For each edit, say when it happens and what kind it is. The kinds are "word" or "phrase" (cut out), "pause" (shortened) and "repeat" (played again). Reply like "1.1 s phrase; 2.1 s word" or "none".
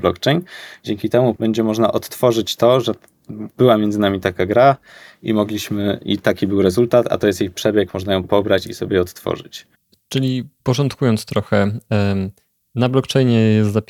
1.4 s word